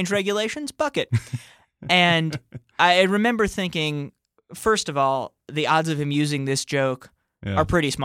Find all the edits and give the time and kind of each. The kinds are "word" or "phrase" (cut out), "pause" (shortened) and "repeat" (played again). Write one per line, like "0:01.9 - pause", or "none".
none